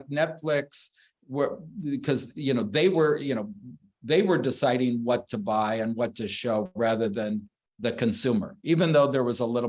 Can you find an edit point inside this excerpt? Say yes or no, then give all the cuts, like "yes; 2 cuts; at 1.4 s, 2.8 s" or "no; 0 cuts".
no; 0 cuts